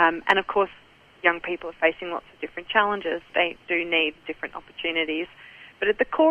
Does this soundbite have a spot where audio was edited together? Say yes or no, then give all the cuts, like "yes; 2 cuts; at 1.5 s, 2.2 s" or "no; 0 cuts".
yes; 2 cuts; at 3.3 s, 4.2 s